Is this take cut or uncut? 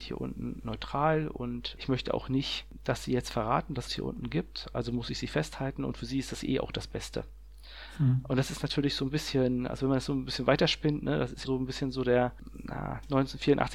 cut